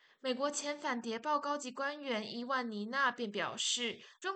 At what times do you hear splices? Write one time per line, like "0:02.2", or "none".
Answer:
none